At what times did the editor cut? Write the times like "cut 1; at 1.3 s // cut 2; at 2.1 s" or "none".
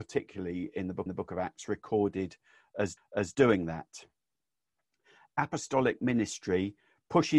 cut 1; at 1.1 s // cut 2; at 3.0 s